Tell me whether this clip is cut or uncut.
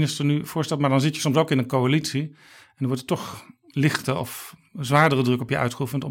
uncut